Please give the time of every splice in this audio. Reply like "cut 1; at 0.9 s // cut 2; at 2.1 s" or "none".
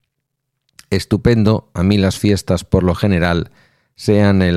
none